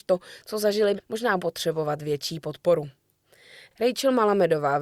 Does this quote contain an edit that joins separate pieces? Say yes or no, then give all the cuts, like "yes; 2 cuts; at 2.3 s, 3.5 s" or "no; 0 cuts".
yes; 2 cuts; at 1.0 s, 1.4 s